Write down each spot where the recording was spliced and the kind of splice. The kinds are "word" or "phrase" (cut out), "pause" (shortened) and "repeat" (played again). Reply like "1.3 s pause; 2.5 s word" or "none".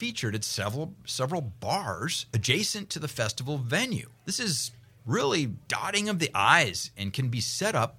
2.3 s pause; 4.2 s pause; 5.6 s pause